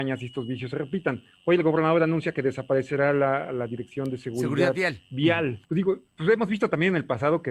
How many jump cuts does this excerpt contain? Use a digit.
2